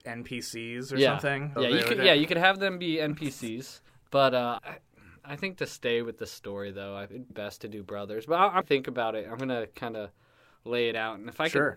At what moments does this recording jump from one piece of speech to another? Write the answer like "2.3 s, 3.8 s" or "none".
1.6 s, 3.9 s, 4.6 s, 7.3 s, 8.6 s